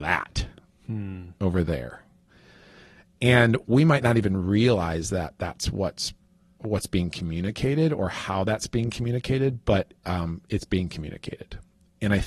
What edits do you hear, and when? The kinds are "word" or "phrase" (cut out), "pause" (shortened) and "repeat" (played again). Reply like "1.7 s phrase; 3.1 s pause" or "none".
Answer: none